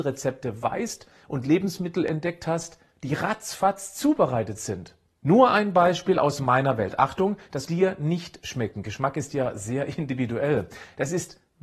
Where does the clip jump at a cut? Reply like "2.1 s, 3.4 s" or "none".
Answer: 7.7 s